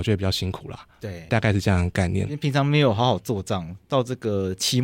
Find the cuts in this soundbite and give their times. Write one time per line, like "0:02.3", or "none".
0:01.3